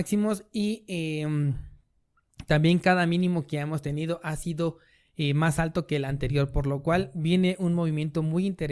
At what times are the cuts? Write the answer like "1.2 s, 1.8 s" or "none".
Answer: none